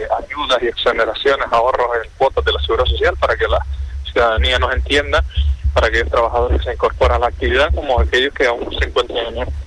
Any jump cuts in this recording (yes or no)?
no